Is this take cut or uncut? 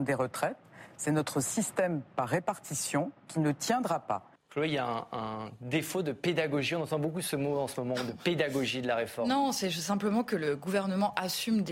cut